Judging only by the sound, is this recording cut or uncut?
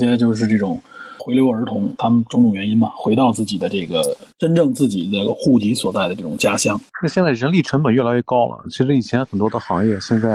cut